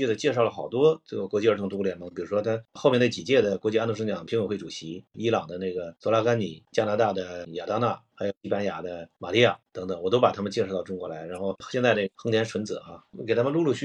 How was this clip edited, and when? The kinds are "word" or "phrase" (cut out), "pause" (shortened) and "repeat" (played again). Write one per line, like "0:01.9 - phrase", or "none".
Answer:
0:07.5 - word

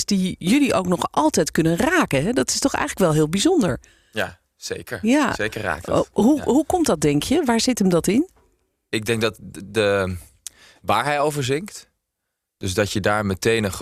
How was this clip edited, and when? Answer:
none

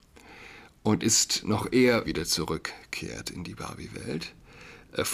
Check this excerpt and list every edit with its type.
0:01.0 - word
0:02.0 - word

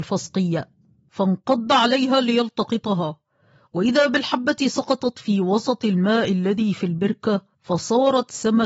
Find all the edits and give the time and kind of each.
0:07.5 - pause

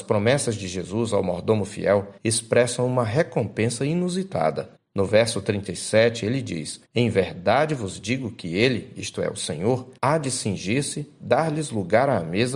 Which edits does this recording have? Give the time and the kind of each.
0:02.2 - pause
0:04.8 - pause
0:06.8 - pause
0:10.0 - pause

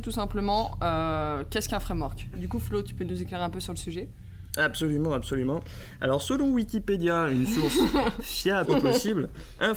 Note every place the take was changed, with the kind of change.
0:08.6 - word

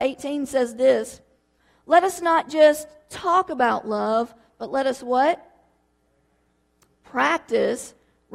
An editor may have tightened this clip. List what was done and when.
none

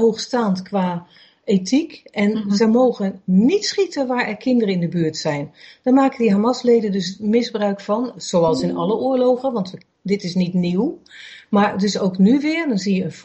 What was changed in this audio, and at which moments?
none

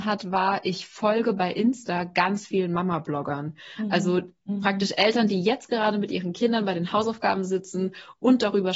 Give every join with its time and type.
none

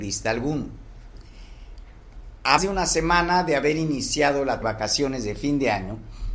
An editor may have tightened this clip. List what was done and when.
0:02.6 - word
0:04.6 - phrase

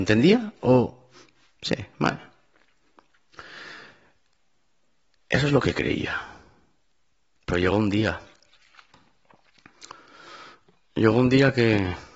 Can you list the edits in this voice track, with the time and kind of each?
none

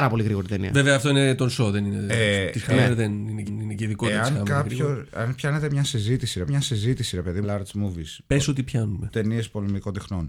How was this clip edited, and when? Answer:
0:03.5 - repeat
0:06.5 - repeat
0:07.4 - phrase

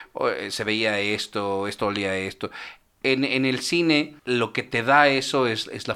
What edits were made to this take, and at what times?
0:04.2 - pause

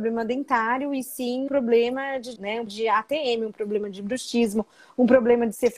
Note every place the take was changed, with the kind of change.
0:01.5 - word
0:02.4 - word
0:02.7 - word

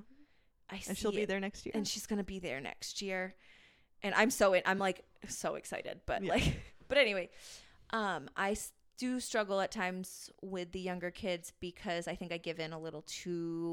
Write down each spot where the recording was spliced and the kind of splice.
none

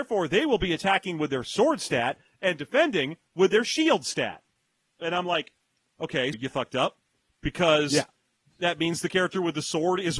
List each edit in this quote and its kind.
0:06.3 - word

